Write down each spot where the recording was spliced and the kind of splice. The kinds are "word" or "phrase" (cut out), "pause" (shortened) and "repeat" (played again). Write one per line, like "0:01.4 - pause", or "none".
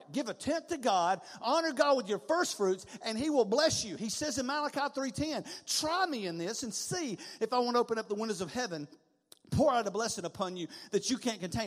none